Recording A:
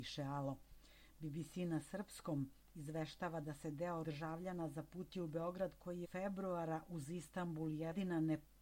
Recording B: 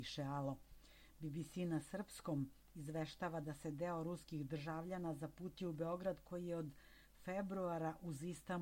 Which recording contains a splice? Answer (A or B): A